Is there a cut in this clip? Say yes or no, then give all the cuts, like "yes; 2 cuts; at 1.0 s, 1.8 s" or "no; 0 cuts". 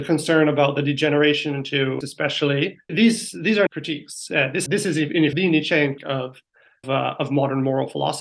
yes; 7 cuts; at 2.0 s, 2.9 s, 3.7 s, 4.7 s, 5.3 s, 6.0 s, 6.8 s